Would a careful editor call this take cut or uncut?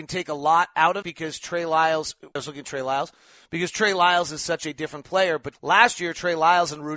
cut